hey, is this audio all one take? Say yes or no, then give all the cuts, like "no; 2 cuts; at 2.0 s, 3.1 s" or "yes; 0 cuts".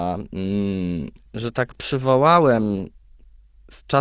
no; 2 cuts; at 1.3 s, 1.7 s